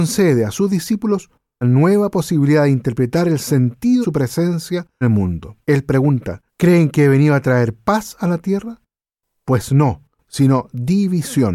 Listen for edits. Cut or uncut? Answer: cut